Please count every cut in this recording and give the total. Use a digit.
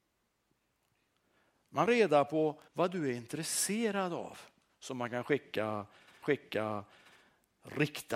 4